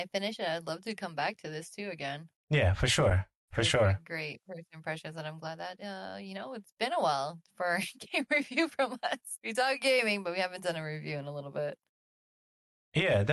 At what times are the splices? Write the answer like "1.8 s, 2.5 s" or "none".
2.4 s

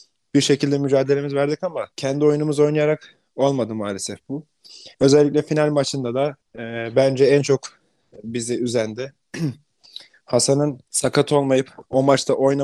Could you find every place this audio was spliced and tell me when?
1.9 s, 4.9 s, 6.4 s, 10.9 s

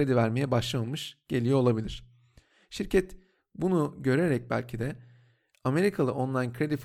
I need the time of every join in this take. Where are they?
none

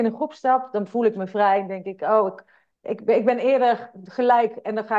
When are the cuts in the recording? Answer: 2.7 s

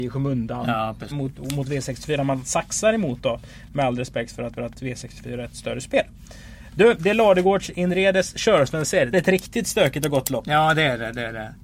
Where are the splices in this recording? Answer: 1.1 s, 4.6 s, 9.1 s

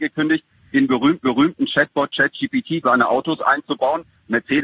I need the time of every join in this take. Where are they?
1.2 s, 2.8 s

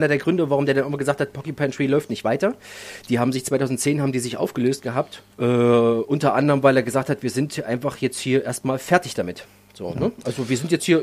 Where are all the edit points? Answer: 5.3 s

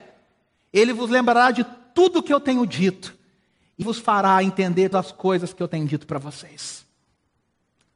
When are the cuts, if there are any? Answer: 3.8 s, 4.9 s

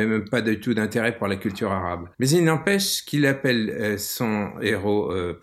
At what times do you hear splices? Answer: 2.1 s

